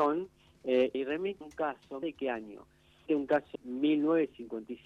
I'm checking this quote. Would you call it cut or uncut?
cut